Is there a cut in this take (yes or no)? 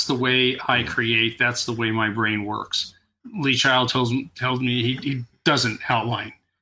no